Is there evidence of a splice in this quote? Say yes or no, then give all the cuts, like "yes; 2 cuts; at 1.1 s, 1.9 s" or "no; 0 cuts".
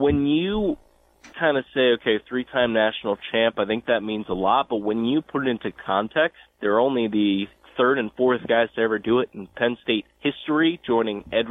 yes; 3 cuts; at 1.3 s, 5.8 s, 6.5 s